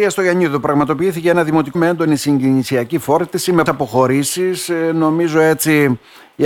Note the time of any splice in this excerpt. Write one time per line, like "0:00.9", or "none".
0:01.7
0:03.7